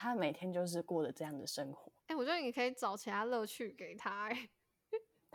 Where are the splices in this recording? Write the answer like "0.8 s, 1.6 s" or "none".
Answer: 2.0 s